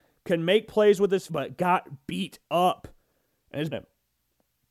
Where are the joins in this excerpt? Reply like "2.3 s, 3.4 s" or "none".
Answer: 1.3 s, 2.4 s, 3.7 s